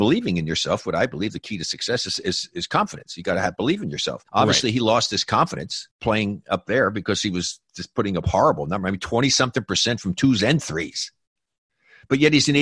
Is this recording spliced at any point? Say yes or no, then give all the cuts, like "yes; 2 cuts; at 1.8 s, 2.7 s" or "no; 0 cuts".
yes; 2 cuts; at 4.3 s, 5.9 s